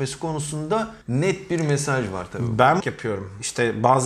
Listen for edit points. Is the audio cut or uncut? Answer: cut